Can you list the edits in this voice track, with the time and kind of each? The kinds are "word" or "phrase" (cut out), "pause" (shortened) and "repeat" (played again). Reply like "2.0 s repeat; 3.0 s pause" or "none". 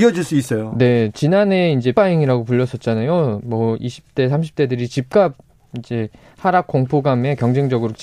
1.9 s word